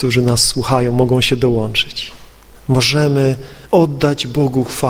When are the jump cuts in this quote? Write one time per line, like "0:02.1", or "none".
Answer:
0:02.5